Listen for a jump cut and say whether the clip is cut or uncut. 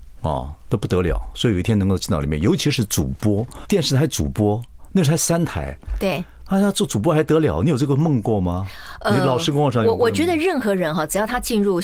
cut